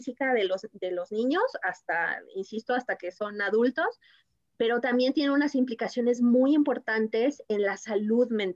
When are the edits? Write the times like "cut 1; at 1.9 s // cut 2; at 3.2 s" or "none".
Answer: none